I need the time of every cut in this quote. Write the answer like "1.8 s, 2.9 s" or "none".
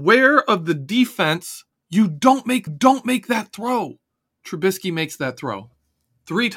1.7 s, 2.7 s, 4.1 s